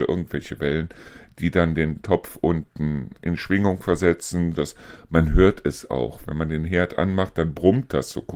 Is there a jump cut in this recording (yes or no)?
yes